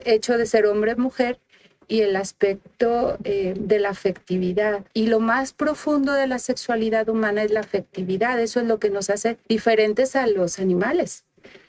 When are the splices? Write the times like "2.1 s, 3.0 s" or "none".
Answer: 4.9 s, 9.4 s